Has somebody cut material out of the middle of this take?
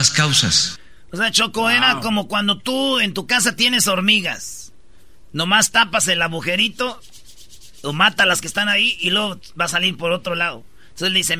no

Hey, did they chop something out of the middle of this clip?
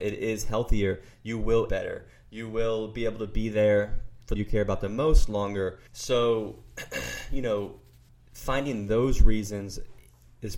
yes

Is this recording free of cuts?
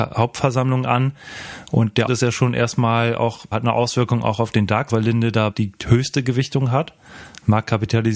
no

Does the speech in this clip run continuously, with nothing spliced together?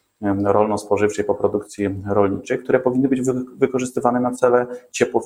yes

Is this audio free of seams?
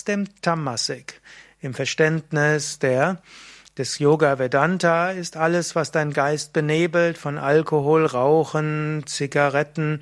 yes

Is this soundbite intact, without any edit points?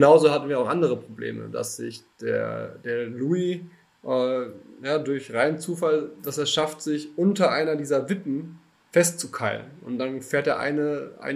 yes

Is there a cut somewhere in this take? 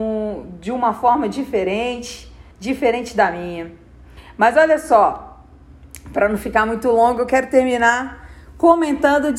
yes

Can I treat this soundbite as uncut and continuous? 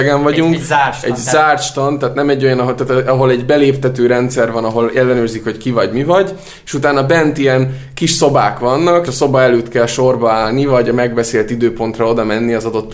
no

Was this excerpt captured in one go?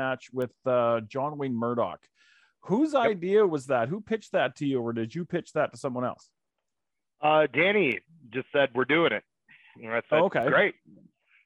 yes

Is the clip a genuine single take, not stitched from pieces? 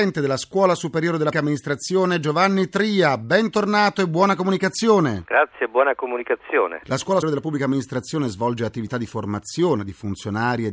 no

